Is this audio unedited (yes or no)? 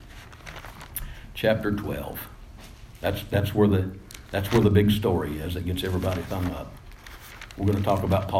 yes